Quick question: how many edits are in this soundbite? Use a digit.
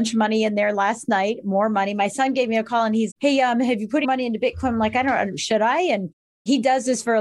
2